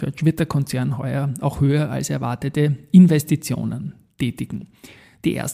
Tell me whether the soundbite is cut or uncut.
uncut